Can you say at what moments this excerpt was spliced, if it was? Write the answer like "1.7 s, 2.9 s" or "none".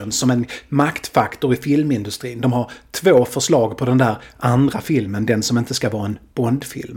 none

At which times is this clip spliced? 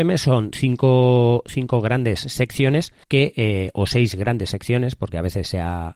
3.0 s

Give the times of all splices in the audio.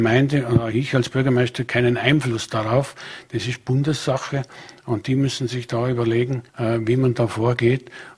6.5 s

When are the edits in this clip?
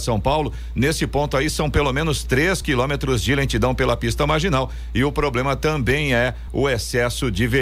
none

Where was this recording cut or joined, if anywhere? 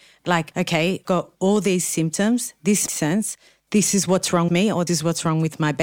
1.0 s, 2.9 s, 4.5 s, 4.9 s

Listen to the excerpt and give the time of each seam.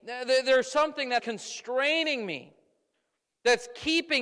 1.2 s

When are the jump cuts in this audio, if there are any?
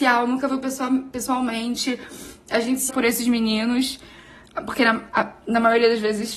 2.9 s

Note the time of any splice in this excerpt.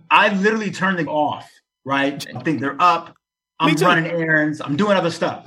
1.1 s, 2.4 s

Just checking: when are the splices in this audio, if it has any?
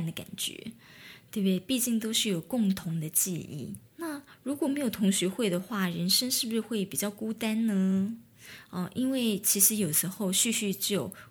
3.9 s

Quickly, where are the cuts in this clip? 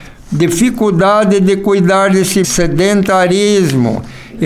2.4 s

